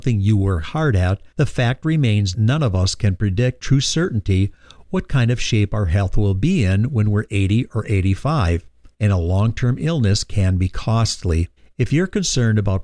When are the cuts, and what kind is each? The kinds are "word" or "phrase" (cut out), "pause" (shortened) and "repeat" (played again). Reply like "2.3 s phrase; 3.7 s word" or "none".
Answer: 1.3 s pause; 2.3 s word; 3.6 s word; 8.9 s pause; 11.6 s pause